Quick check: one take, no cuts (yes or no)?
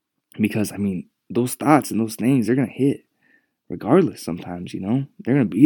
yes